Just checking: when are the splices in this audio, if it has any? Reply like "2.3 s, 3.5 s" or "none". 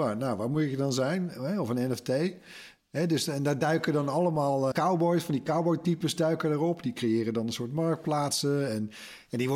4.7 s